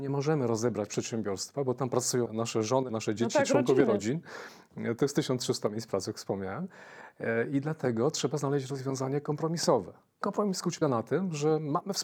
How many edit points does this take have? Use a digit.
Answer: 4